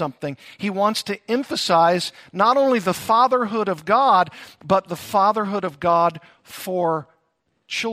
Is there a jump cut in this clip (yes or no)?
no